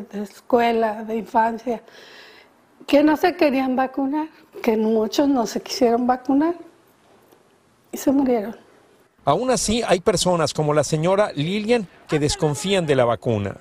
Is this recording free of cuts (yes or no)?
yes